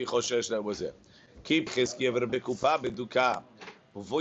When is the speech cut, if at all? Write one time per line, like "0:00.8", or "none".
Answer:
0:01.7
0:02.3

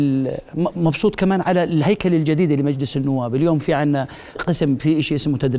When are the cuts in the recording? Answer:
0:04.4

